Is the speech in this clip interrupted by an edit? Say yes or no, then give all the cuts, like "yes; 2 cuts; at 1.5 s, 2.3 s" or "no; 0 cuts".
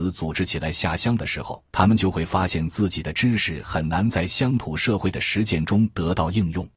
yes; 1 cut; at 1.7 s